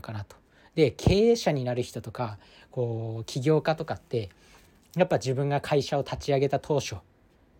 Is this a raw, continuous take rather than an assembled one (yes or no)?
yes